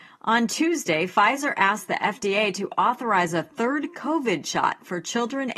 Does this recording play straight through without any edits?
yes; 0 cuts

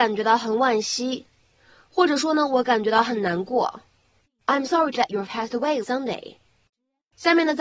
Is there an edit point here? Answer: yes; 4 cuts; at 4.7 s, 5.0 s, 5.3 s, 5.8 s

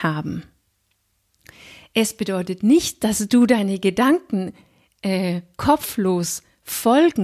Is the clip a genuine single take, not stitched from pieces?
yes; 0 cuts

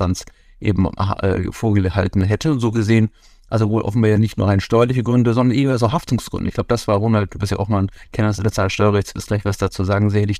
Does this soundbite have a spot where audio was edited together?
no; 0 cuts

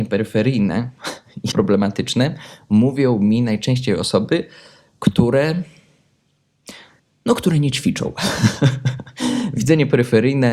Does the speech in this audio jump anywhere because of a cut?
yes; 2 cuts; at 1.5 s, 7.0 s

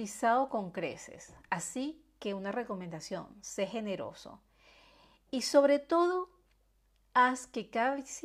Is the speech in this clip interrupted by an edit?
no; 0 cuts

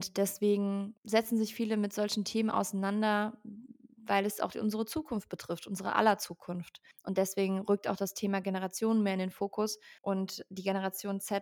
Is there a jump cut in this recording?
yes; 3 cuts; at 1.0 s, 6.9 s, 10.0 s

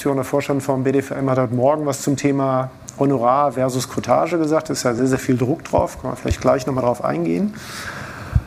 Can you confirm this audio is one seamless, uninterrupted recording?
yes; 0 cuts

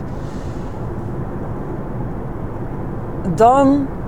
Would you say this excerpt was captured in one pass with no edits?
yes; 0 cuts

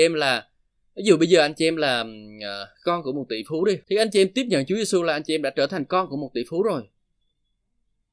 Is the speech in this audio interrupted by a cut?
yes; 2 cuts; at 2.7 s, 3.8 s

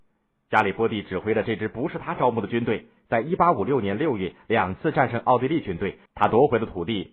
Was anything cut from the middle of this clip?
yes; 1 cut; at 6.1 s

